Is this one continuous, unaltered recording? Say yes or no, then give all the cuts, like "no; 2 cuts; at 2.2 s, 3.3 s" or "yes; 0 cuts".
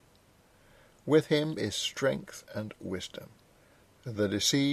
yes; 0 cuts